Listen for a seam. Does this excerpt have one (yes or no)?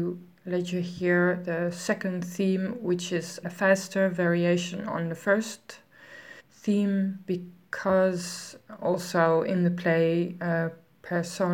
yes